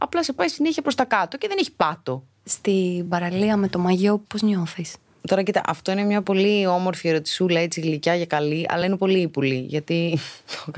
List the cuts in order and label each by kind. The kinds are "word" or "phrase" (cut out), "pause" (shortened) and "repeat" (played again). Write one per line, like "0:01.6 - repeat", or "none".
none